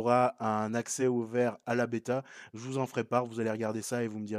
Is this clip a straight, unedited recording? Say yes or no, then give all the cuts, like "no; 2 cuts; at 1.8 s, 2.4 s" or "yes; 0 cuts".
yes; 0 cuts